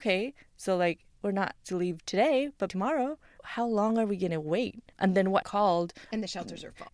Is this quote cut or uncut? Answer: cut